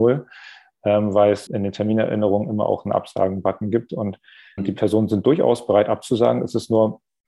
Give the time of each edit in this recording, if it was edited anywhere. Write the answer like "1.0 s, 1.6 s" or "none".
1.5 s, 4.6 s